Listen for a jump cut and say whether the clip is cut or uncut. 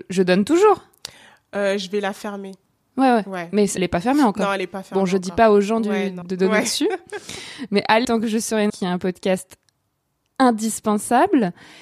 cut